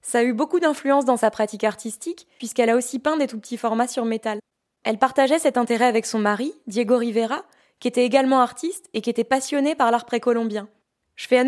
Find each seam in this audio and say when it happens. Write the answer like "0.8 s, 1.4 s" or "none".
none